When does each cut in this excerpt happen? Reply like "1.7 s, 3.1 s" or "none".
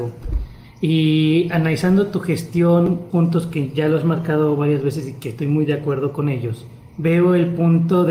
3.1 s